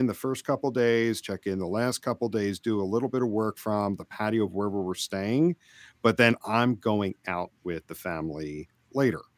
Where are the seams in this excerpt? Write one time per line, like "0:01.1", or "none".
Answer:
none